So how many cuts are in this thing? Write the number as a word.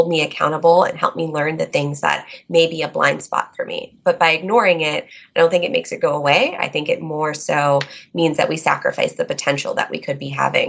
zero